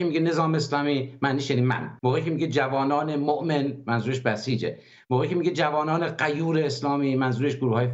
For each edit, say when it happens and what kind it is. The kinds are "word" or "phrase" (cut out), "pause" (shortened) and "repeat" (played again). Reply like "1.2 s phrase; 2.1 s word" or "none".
2.0 s pause